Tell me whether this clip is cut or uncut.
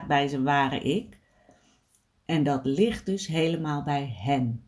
uncut